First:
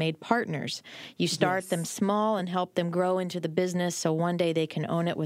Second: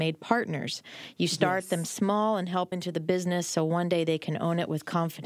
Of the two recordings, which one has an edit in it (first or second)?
second